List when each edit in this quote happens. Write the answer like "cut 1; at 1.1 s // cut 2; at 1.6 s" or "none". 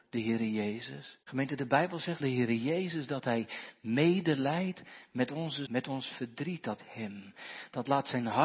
cut 1; at 1.2 s // cut 2; at 2.2 s // cut 3; at 5.6 s // cut 4; at 6.8 s